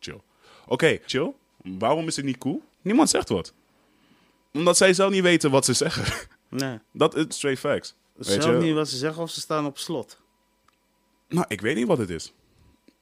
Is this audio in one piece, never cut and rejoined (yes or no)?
no